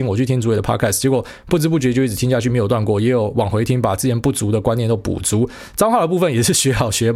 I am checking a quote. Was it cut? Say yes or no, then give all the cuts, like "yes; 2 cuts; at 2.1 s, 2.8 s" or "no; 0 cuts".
no; 0 cuts